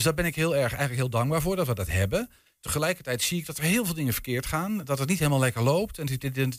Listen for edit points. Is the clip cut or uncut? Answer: uncut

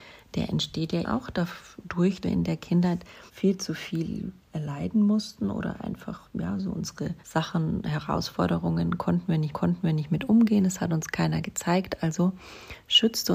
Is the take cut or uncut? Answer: cut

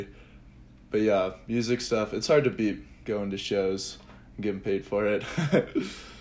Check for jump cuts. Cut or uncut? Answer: cut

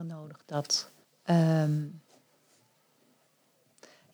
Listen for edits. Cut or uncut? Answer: cut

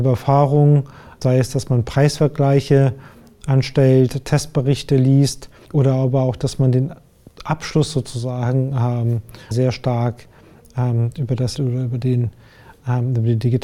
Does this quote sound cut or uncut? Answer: cut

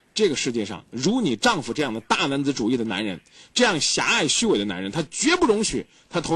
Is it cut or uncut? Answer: uncut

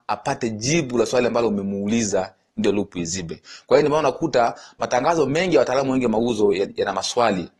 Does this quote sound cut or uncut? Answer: uncut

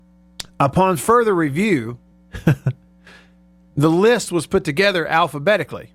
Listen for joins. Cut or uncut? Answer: cut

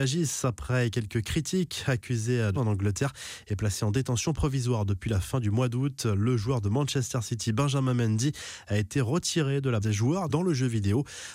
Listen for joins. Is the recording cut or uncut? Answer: cut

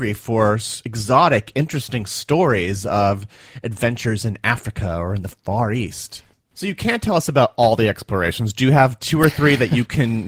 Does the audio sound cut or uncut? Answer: uncut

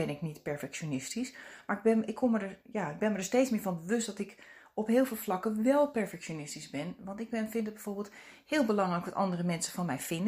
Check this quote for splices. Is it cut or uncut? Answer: uncut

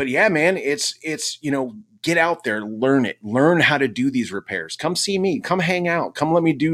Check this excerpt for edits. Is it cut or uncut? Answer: uncut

